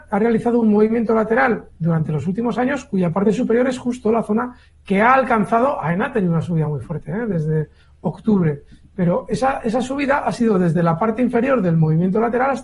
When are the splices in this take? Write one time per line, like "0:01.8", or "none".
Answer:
none